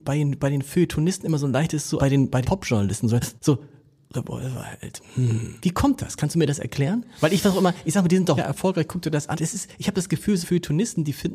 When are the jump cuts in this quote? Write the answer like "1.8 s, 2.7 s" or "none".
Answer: 2.0 s, 2.4 s, 3.4 s, 5.6 s, 8.4 s, 9.3 s, 10.4 s